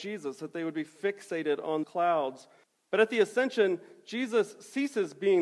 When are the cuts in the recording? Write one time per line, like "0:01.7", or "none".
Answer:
0:01.8
0:02.6